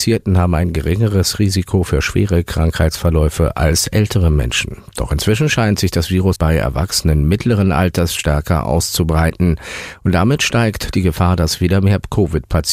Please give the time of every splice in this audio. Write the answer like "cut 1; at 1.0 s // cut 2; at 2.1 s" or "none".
cut 1; at 6.3 s